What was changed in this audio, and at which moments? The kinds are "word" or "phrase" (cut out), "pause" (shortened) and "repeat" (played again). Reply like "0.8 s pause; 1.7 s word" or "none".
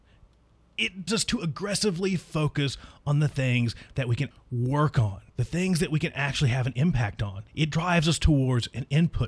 1.1 s word; 4.3 s word; 5.3 s pause; 7.5 s pause